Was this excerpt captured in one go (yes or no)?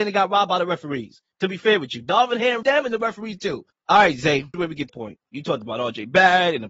no